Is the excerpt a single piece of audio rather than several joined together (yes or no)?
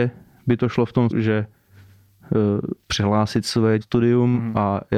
no